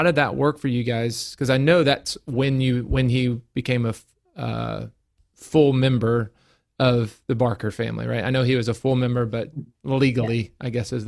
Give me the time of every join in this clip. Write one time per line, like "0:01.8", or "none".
none